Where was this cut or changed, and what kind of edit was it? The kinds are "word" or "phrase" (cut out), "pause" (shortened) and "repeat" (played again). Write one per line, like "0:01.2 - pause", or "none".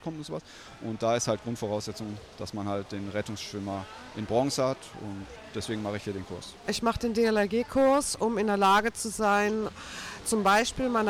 none